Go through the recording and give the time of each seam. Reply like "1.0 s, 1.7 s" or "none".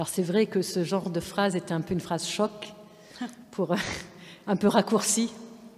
none

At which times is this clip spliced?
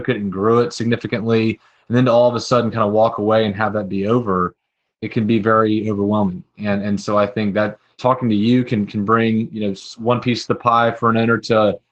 none

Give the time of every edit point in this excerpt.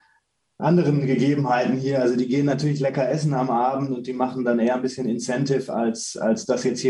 none

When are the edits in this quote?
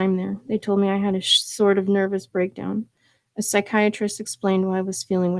none

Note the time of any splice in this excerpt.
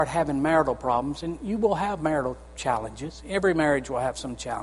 none

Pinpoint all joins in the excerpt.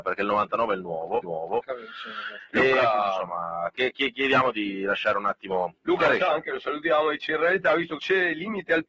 1.2 s, 5.8 s, 8.0 s

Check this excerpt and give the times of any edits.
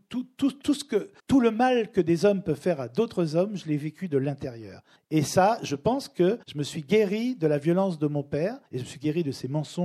1.2 s, 5.0 s, 6.4 s, 8.7 s

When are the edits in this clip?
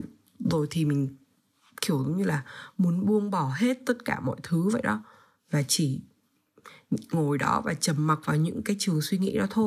none

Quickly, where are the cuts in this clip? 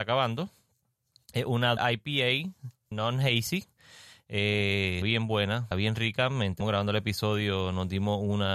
1.8 s, 2.9 s, 5.0 s, 5.7 s, 6.6 s

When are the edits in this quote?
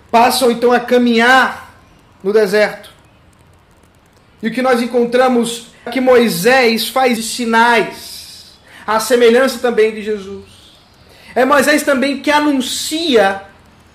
5.9 s, 7.2 s

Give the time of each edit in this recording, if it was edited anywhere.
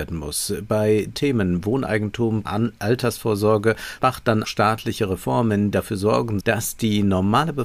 1.1 s, 2.4 s, 4.0 s, 4.4 s, 5.7 s, 6.4 s

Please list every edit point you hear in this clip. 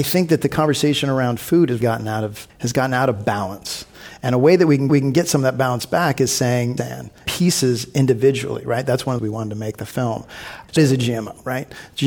1.8 s, 2.5 s, 4.9 s, 6.8 s, 7.3 s, 9.2 s, 10.8 s

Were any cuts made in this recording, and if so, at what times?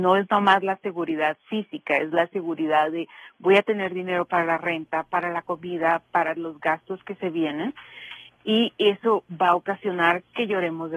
none

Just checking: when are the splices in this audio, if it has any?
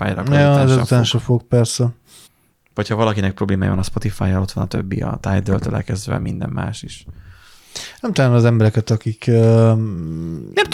2.3 s, 8.1 s

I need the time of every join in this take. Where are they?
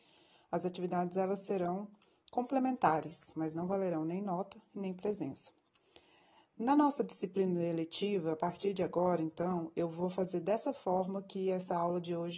none

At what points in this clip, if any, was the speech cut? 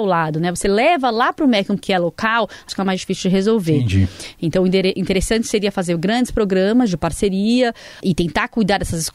1.8 s, 2.7 s

